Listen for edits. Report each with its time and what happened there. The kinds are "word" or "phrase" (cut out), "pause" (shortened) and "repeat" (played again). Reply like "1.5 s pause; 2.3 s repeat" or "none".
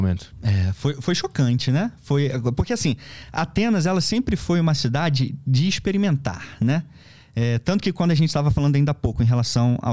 none